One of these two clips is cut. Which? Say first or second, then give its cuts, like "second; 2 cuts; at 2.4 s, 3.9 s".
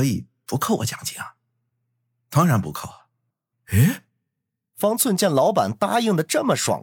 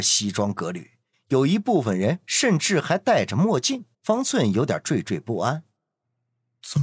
second; 1 cut; at 3.9 s